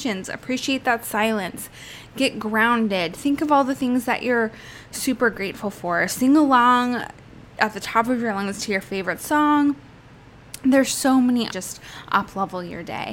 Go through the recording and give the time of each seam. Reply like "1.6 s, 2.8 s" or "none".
11.5 s